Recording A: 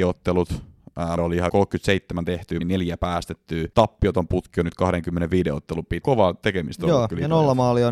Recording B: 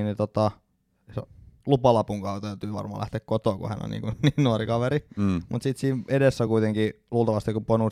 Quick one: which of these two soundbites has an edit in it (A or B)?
A